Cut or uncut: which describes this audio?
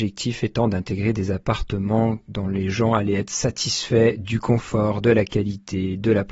uncut